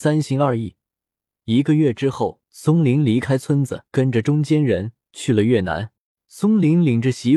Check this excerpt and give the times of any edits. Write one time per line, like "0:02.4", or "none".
0:02.4
0:03.9
0:06.1